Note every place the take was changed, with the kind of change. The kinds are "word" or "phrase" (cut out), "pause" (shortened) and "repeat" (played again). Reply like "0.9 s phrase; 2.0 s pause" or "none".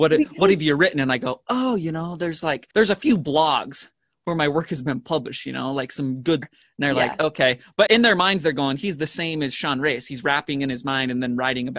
2.7 s pause; 6.4 s phrase; 7.9 s word